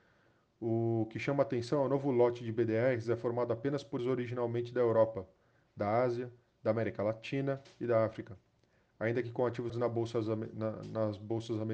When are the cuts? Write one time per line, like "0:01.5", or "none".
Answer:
0:04.0
0:09.7